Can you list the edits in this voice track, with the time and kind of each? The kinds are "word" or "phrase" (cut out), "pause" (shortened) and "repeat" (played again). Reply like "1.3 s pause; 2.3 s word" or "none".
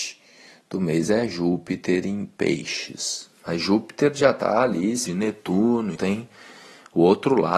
5.1 s phrase; 6.0 s word